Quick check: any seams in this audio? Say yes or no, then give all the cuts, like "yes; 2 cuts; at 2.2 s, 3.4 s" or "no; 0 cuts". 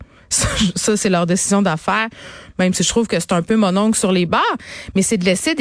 no; 0 cuts